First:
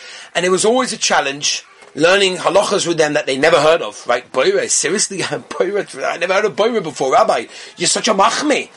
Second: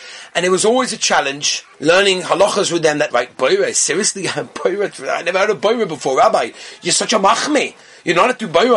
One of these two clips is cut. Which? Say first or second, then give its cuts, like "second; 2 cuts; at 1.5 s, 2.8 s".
second; 2 cuts; at 1.7 s, 3.1 s